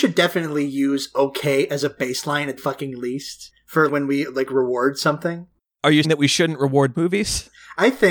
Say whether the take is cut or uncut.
cut